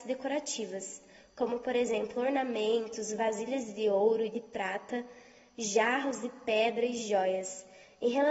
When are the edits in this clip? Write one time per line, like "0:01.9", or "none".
none